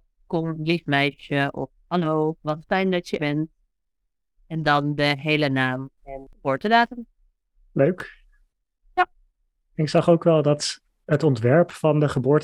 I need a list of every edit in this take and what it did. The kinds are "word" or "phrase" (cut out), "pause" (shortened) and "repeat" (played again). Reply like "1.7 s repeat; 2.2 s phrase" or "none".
3.2 s word